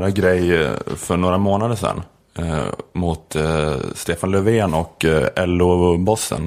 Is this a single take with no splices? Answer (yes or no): yes